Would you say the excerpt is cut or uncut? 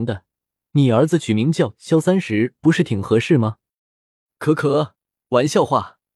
uncut